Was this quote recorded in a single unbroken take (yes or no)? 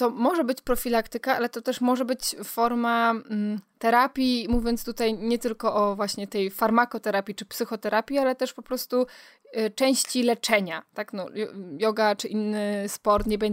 no